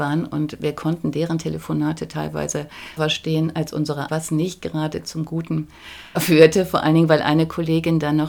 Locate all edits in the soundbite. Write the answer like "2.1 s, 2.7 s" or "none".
3.0 s, 4.1 s, 6.2 s